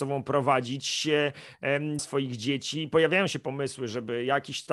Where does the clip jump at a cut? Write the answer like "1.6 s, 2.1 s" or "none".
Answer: 2.0 s